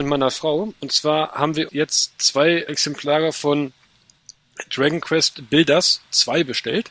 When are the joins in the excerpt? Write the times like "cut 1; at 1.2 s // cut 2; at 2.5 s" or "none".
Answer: cut 1; at 1.7 s // cut 2; at 2.7 s